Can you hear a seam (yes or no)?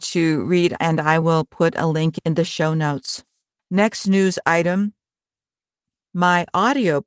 no